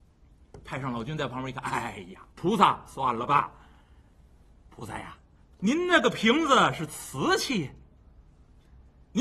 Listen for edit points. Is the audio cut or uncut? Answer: cut